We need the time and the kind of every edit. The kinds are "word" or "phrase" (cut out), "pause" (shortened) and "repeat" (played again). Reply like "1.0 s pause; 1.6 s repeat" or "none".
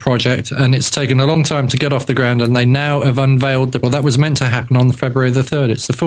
3.8 s word